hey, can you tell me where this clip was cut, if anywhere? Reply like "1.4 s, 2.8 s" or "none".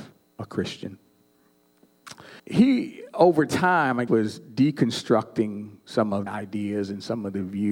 2.4 s, 4.1 s, 6.3 s